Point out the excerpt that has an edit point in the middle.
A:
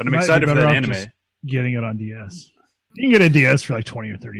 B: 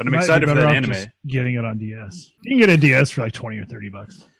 B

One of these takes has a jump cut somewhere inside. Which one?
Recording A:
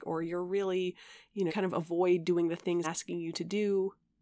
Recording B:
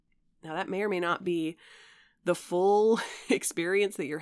A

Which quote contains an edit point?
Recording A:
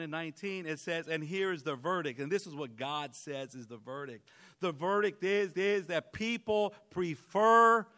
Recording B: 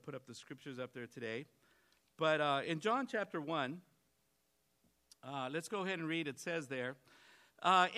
A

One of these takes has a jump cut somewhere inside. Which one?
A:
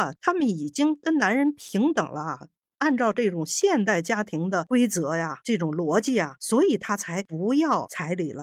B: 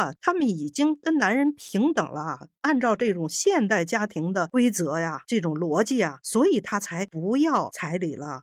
B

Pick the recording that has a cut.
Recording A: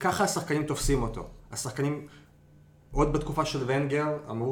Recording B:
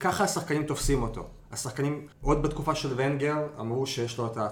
B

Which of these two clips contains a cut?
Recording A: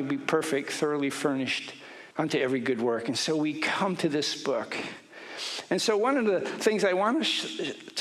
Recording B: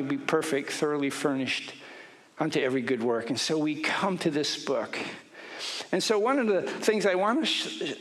A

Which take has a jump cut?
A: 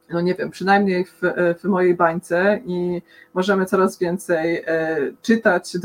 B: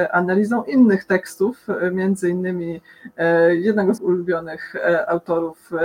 B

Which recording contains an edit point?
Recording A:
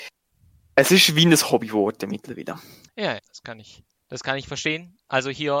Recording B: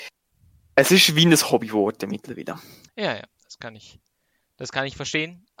A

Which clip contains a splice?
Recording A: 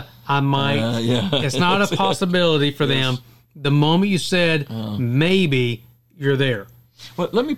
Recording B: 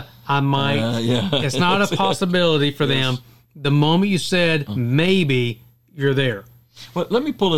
B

